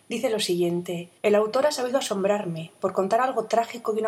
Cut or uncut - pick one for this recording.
cut